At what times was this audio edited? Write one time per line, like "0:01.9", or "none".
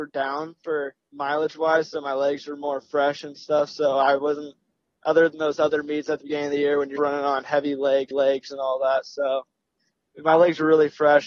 0:01.1
0:07.0
0:08.1